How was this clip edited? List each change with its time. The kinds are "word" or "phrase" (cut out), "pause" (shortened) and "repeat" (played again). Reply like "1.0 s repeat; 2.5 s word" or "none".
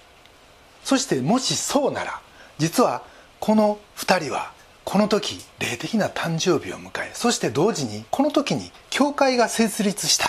3.8 s pause; 5.5 s pause; 8.1 s pause